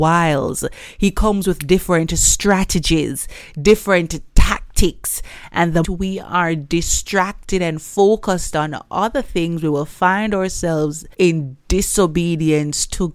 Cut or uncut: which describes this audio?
cut